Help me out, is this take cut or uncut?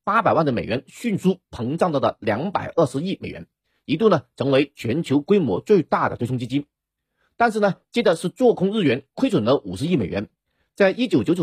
uncut